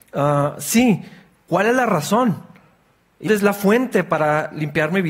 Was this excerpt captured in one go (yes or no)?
no